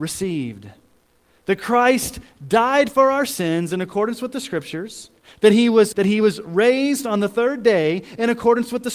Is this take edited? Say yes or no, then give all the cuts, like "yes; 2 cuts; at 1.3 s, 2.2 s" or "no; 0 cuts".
yes; 2 cuts; at 5.2 s, 5.9 s